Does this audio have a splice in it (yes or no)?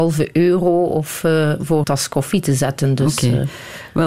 yes